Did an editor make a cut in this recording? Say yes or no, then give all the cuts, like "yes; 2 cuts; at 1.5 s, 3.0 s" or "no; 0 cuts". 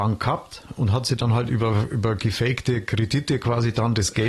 no; 0 cuts